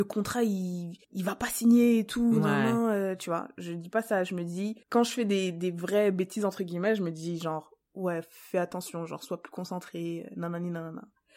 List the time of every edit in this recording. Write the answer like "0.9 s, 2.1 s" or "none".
1.0 s, 4.8 s